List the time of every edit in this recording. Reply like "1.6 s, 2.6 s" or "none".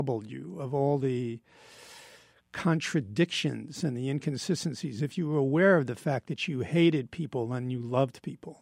none